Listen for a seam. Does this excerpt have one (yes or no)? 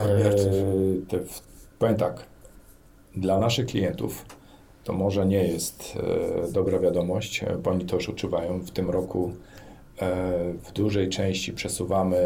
no